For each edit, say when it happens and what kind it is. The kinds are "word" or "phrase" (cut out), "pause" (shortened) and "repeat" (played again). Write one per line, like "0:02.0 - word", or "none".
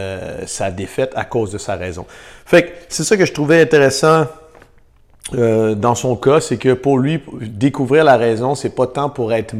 none